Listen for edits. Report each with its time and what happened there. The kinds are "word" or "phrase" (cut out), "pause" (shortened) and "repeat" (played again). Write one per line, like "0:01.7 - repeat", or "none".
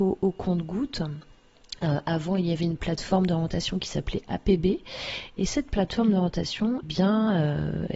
0:06.8 - word